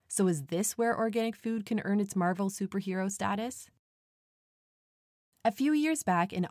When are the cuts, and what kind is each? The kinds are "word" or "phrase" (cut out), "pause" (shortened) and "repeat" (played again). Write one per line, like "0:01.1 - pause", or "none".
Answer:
none